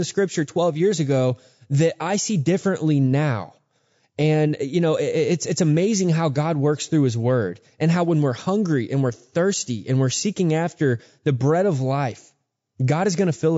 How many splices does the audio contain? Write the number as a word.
zero